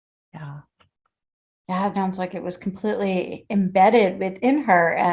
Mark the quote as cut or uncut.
cut